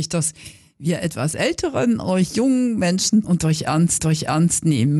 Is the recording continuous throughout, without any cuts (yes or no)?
no